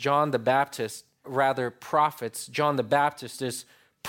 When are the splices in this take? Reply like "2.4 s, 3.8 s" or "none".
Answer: 1.2 s